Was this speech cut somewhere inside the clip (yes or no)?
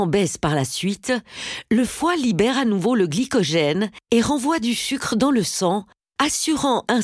no